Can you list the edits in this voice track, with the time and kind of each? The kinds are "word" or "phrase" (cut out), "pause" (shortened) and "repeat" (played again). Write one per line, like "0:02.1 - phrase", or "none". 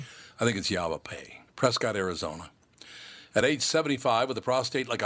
none